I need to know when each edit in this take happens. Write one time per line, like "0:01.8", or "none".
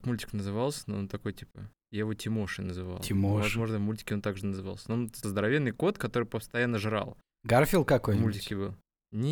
0:01.8
0:05.2